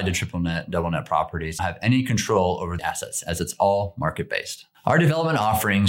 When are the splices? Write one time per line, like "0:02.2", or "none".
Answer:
0:01.6
0:02.8